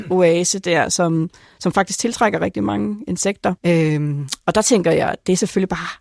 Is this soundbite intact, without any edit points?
no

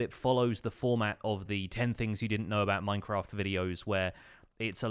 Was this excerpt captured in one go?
yes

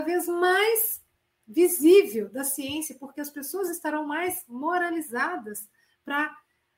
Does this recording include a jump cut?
no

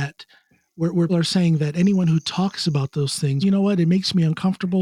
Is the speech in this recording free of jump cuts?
no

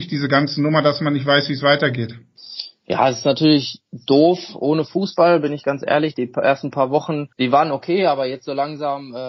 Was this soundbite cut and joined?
yes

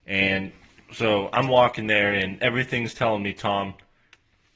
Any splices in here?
no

